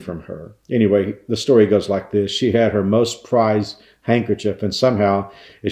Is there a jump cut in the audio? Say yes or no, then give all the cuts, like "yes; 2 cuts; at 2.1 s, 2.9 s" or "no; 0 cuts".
no; 0 cuts